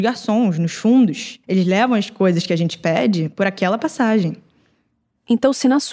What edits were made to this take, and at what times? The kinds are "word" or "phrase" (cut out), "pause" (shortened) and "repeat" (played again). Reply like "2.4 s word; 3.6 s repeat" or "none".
1.4 s pause

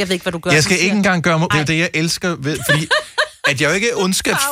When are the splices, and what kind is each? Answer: 1.5 s word

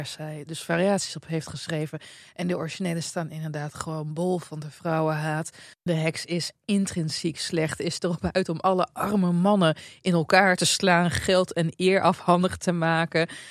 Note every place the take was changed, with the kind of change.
none

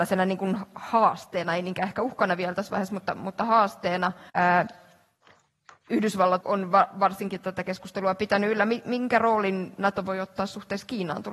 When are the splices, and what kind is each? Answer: 4.3 s pause; 6.4 s word

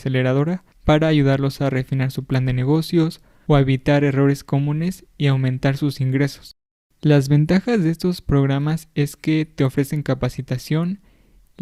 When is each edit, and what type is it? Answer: none

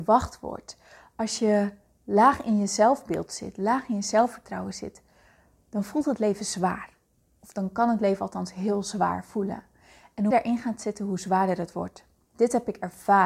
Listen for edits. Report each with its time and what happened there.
10.3 s phrase

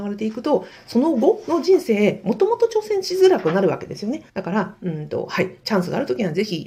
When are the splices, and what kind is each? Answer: 4.3 s pause; 5.6 s phrase

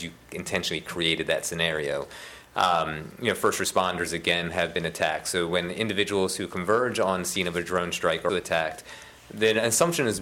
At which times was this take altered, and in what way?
8.3 s word

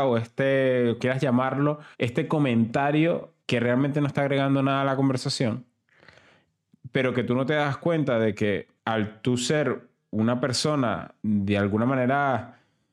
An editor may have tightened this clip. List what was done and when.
1.0 s word; 1.9 s pause; 3.4 s pause; 8.8 s pause; 11.2 s pause

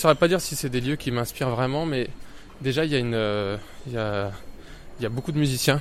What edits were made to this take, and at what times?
none

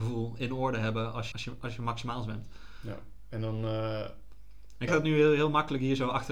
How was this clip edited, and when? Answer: 1.3 s word; 4.9 s word

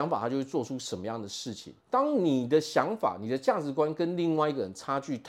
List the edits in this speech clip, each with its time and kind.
1.8 s pause

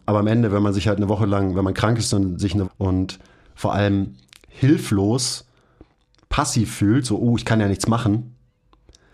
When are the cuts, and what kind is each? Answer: 2.6 s phrase

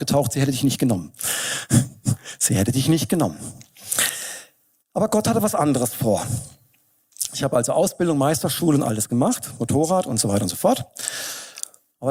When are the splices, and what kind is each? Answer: none

